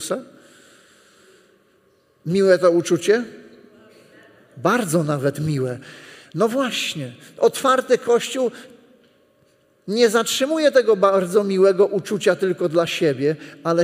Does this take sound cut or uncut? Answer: uncut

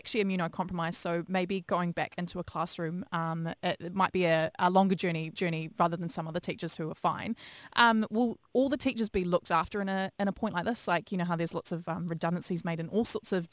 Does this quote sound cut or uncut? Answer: cut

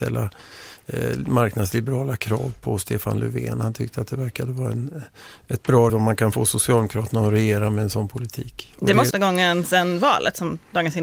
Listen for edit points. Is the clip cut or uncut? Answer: cut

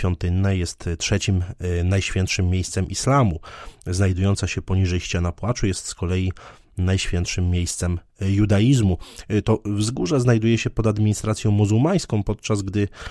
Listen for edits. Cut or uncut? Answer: uncut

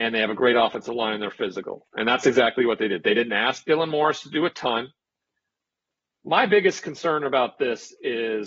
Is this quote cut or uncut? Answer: uncut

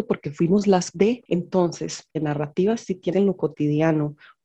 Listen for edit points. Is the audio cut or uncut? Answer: cut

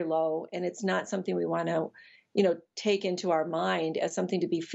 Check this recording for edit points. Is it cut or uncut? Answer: uncut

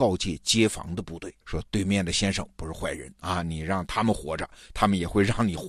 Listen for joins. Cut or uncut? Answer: cut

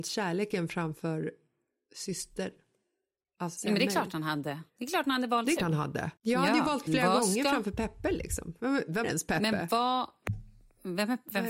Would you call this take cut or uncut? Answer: cut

